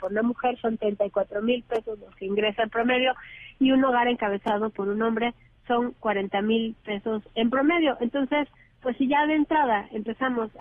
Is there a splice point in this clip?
no; 0 cuts

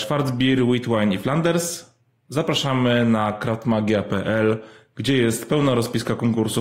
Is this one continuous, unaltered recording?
yes; 0 cuts

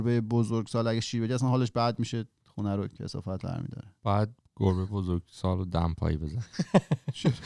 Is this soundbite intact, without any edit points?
yes; 0 cuts

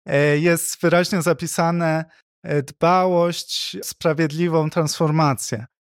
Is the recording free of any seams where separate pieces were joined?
no; 1 cut; at 3.8 s

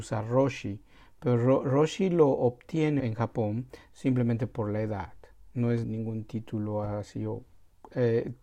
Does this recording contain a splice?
yes; 2 cuts; at 3.0 s, 5.8 s

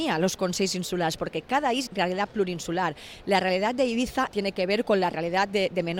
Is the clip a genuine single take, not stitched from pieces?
no; 2 cuts; at 1.9 s, 4.3 s

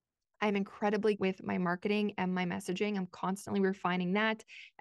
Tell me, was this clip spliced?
yes; 1 cut; at 1.2 s

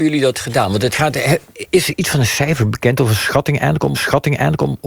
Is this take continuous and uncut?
no; 1 cut; at 3.9 s

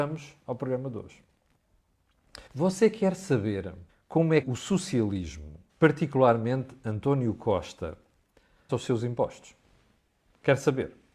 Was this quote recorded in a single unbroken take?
no; 5 cuts; at 2.5 s, 3.9 s, 4.4 s, 5.7 s, 8.7 s

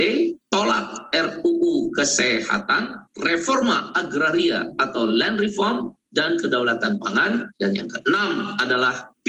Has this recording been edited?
yes; 1 cut; at 7.5 s

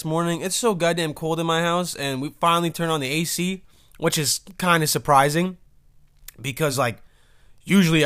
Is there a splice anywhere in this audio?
no; 0 cuts

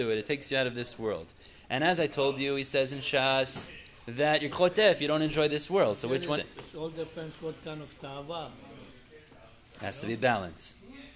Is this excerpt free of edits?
no; 2 cuts; at 4.5 s, 6.4 s

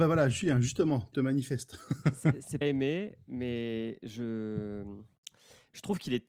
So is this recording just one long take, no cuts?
no; 2 cuts; at 1.1 s, 2.6 s

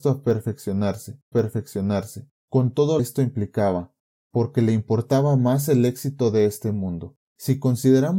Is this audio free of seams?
no; 3 cuts; at 1.3 s, 3.0 s, 7.2 s

